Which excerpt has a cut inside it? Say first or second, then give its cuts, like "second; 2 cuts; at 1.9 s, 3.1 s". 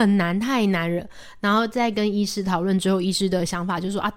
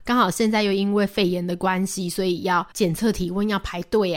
second; 1 cut; at 2.7 s